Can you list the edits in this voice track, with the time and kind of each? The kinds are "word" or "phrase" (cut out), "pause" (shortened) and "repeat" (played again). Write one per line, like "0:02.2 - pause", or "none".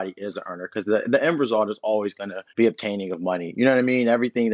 0:02.5 - pause